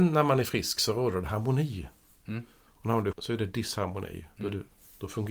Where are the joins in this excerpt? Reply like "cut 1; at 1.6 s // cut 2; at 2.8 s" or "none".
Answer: cut 1; at 3.1 s